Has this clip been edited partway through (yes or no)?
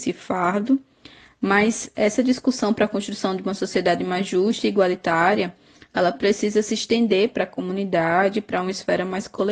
no